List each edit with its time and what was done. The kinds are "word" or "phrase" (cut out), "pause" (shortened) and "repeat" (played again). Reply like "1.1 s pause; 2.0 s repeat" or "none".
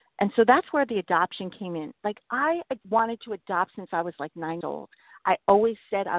2.8 s pause; 4.6 s word